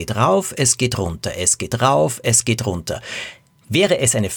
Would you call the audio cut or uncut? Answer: uncut